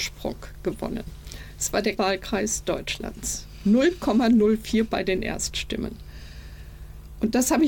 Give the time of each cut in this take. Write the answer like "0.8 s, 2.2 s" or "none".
2.0 s, 4.9 s